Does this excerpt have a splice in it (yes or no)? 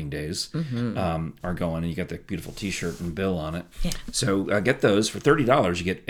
yes